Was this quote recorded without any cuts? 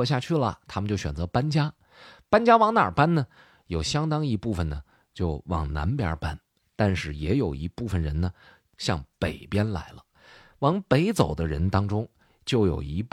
yes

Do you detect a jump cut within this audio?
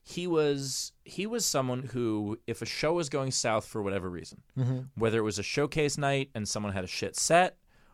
no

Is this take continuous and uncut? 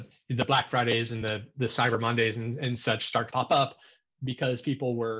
yes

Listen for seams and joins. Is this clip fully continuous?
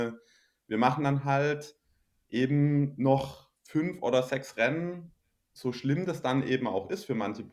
yes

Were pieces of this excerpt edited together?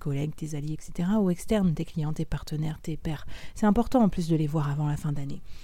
no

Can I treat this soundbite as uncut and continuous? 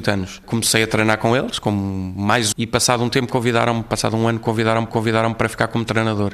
no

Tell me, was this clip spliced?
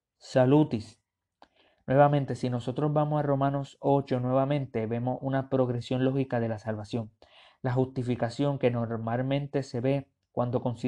no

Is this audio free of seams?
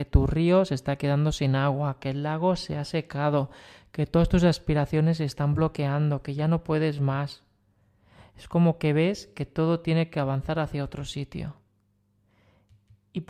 yes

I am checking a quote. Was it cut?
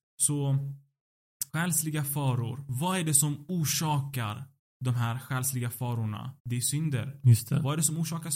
yes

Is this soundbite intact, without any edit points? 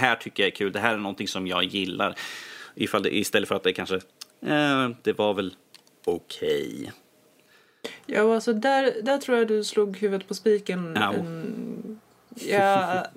yes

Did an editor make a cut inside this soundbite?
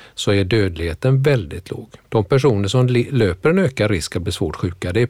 yes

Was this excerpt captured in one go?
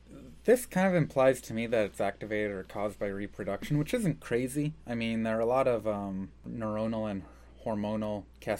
yes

